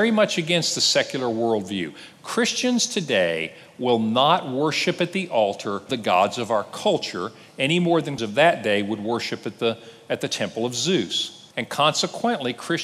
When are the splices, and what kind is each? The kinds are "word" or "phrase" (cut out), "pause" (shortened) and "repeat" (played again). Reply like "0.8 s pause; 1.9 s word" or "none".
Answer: 5.9 s word; 8.2 s word; 11.5 s pause